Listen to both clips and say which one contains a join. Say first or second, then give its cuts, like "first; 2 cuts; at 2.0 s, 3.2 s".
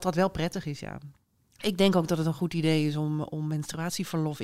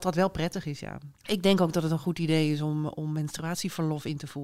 second; 1 cut; at 1.2 s